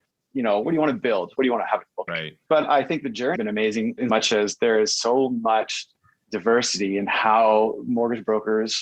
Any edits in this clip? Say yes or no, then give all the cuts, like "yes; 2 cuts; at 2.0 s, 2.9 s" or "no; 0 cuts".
yes; 3 cuts; at 2.1 s, 3.4 s, 4.1 s